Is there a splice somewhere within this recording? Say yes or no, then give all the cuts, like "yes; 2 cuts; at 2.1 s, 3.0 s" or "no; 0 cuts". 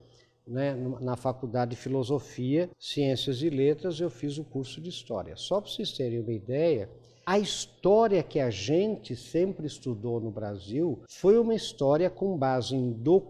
yes; 3 cuts; at 2.7 s, 7.3 s, 11.1 s